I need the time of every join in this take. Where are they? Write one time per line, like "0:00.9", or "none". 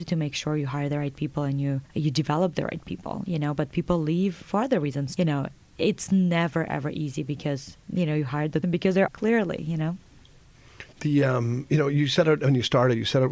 0:01.9
0:05.2
0:06.7
0:07.8
0:08.6
0:09.1
0:10.9